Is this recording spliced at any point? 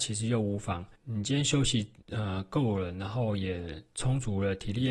yes; 2 cuts; at 0.9 s, 2.0 s

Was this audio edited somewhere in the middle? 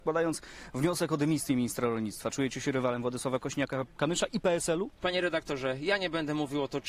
no; 0 cuts

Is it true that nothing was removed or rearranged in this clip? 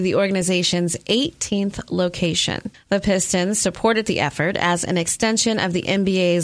no; 1 cut; at 2.7 s

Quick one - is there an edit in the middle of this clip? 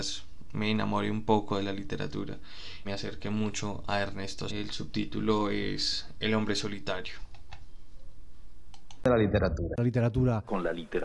yes; 3 cuts; at 2.8 s, 3.8 s, 4.5 s

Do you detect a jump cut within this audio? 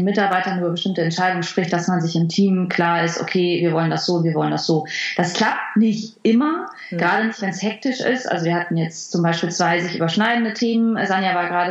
no; 0 cuts

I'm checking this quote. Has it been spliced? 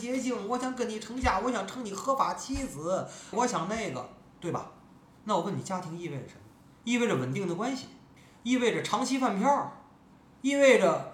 yes; 4 cuts; at 3.3 s, 6.6 s, 8.2 s, 10.1 s

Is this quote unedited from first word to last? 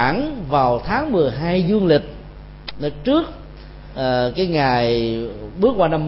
yes; 0 cuts

